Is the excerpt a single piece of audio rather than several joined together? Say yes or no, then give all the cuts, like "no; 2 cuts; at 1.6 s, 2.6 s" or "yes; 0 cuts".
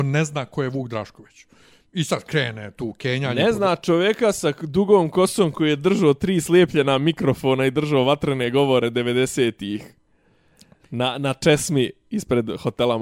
yes; 0 cuts